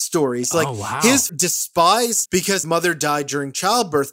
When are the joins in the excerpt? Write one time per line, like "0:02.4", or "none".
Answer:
0:01.3
0:02.3
0:02.6